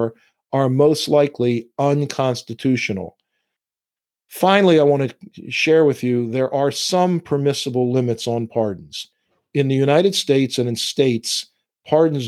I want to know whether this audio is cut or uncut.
uncut